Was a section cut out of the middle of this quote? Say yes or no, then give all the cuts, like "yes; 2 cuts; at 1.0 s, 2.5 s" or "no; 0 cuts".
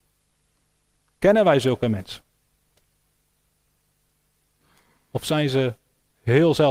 no; 0 cuts